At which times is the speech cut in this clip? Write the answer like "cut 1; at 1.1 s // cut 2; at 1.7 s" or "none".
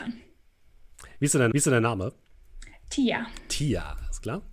cut 1; at 1.5 s

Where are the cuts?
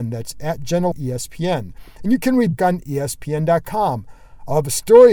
cut 1; at 0.9 s // cut 2; at 2.6 s

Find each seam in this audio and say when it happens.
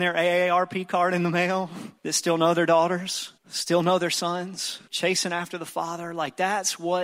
cut 1; at 2.0 s // cut 2; at 3.4 s // cut 3; at 4.9 s

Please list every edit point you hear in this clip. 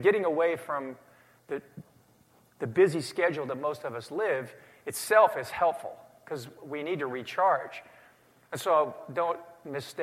none

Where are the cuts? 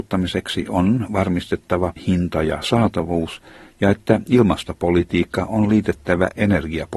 cut 1; at 2.0 s

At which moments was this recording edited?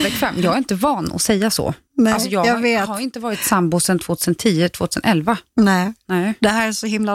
none

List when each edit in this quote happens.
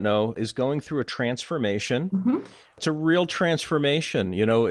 none

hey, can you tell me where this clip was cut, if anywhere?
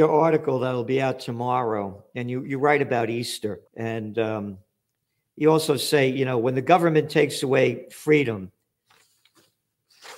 cut 1; at 3.7 s

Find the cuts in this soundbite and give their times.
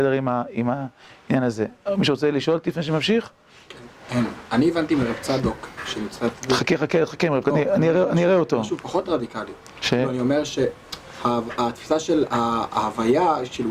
cut 1; at 7.4 s

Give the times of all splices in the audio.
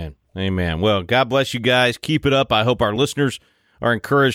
none

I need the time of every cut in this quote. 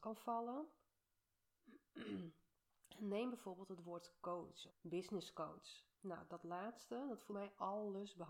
cut 1; at 4.7 s // cut 2; at 5.9 s // cut 3; at 7.3 s

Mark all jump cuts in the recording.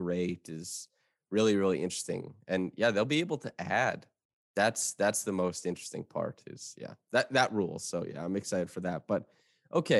none

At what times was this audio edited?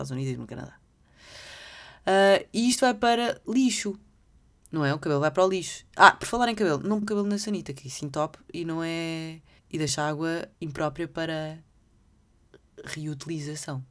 cut 1; at 7.0 s // cut 2; at 9.6 s // cut 3; at 10.5 s

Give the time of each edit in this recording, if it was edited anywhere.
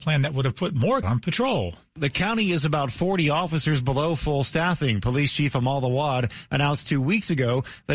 cut 1; at 1.0 s

